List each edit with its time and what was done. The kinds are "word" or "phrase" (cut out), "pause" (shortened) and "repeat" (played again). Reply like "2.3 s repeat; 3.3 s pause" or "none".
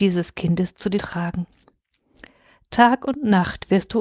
1.0 s word